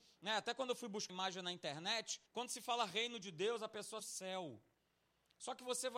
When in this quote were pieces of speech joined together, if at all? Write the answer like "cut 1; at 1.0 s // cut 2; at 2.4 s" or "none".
cut 1; at 1.1 s // cut 2; at 2.3 s // cut 3; at 4.0 s